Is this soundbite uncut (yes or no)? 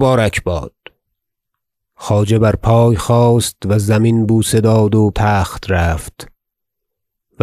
no